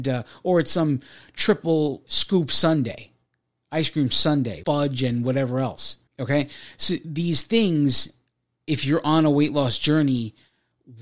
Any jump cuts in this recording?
yes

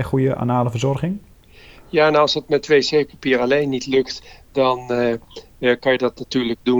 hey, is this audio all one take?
yes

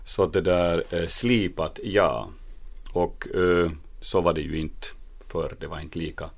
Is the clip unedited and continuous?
yes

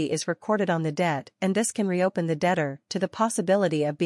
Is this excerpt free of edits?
yes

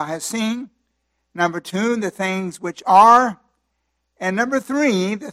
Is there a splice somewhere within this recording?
no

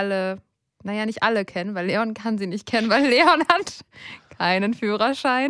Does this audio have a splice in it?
no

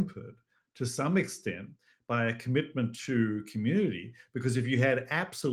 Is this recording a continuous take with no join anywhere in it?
yes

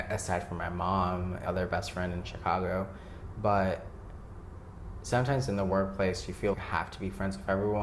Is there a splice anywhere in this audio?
yes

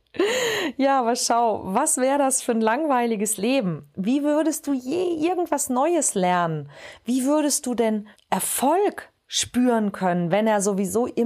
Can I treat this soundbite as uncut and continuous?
no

